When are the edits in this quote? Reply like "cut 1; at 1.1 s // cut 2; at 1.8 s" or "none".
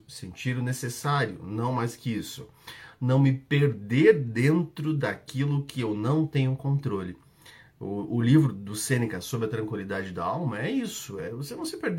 none